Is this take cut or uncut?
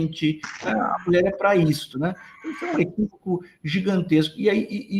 uncut